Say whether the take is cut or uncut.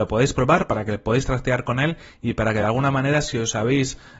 uncut